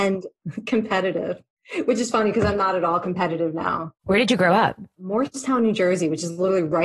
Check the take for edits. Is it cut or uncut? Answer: uncut